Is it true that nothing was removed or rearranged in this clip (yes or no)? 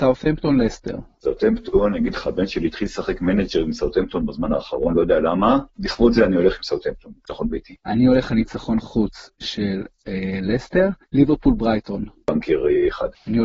no